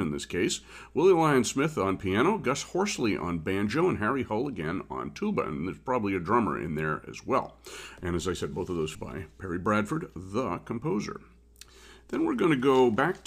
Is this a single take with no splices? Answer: no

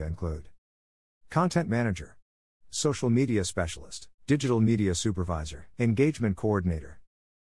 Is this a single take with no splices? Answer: no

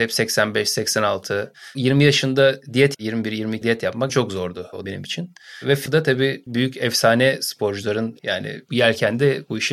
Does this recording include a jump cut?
yes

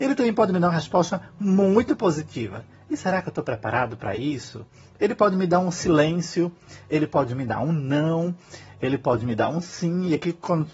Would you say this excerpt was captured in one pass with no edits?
yes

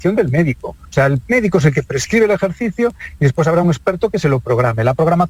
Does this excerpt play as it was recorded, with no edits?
yes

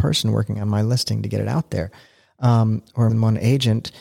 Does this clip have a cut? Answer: yes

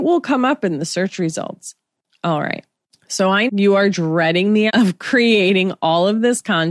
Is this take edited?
yes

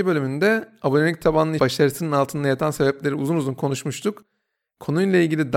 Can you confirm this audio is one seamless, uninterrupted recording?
no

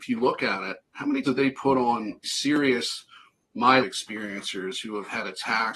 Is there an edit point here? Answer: yes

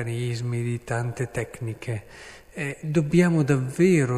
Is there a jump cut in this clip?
no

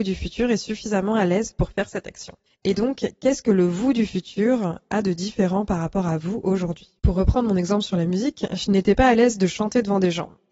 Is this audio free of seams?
no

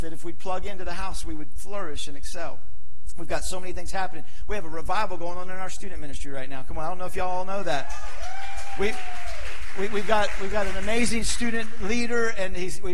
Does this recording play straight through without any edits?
yes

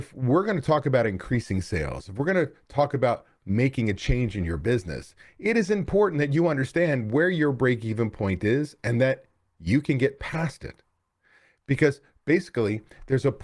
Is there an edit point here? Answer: no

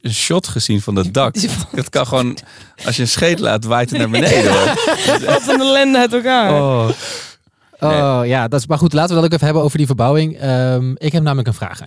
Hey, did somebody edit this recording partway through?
no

